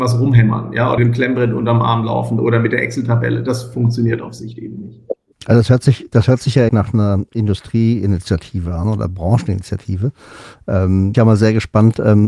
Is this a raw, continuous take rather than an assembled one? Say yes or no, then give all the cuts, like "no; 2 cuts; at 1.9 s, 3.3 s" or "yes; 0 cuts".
no; 4 cuts; at 1.0 s, 5.3 s, 6.7 s, 11.1 s